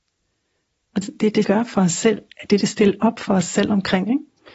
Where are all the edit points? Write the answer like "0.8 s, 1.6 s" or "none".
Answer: 1.0 s, 1.4 s, 2.6 s